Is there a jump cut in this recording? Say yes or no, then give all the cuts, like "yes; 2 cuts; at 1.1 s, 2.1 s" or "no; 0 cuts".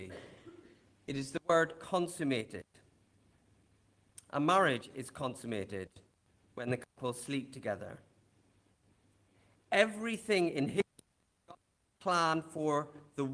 no; 0 cuts